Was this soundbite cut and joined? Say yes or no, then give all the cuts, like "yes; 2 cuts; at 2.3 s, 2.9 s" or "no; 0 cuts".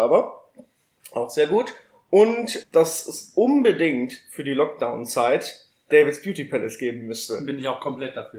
no; 0 cuts